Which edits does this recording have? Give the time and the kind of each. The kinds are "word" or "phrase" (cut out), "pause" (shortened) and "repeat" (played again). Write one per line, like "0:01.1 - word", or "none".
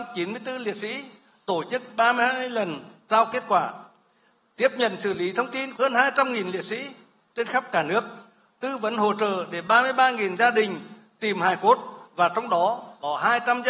none